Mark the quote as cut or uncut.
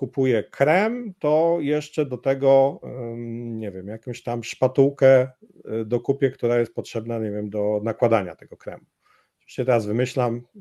uncut